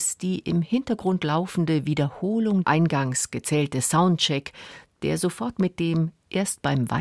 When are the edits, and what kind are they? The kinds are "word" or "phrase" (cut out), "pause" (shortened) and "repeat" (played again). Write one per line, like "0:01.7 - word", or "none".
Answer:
0:02.6 - phrase